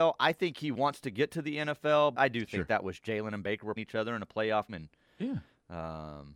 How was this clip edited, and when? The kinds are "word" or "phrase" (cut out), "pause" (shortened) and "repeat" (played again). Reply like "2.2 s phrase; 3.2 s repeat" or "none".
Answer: 2.1 s word; 3.0 s word; 3.8 s word; 4.7 s word